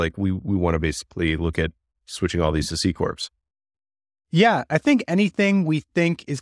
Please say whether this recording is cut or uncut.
uncut